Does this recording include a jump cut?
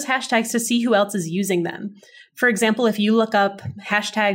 no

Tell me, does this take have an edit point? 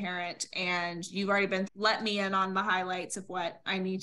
yes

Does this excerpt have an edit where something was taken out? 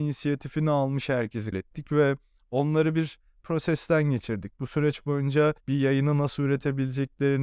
yes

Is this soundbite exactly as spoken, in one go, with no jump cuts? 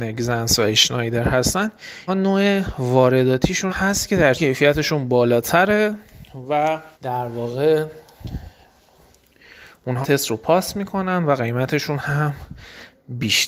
no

